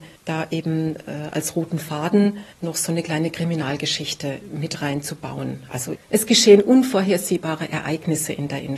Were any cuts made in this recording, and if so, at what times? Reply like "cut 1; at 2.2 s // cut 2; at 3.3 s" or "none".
cut 1; at 2.5 s